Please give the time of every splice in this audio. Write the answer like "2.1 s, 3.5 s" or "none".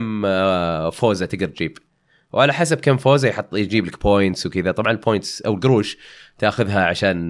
none